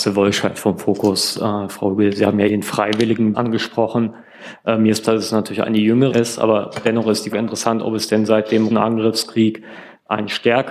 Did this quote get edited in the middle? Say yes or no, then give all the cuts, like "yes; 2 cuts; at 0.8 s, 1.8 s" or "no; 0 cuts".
yes; 6 cuts; at 2.5 s, 3.3 s, 5.0 s, 6.1 s, 7.3 s, 8.7 s